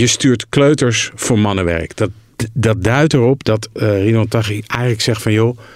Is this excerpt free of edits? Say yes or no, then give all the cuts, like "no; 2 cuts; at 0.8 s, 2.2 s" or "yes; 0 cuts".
yes; 0 cuts